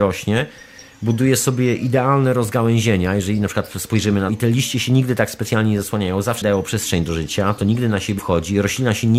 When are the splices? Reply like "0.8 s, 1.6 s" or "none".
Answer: 4.3 s, 6.4 s, 8.2 s